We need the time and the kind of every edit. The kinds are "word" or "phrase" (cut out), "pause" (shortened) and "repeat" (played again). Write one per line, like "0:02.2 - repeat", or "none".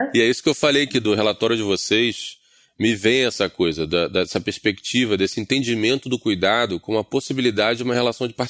none